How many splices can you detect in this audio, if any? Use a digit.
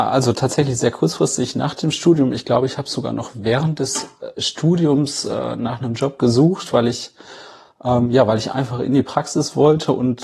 0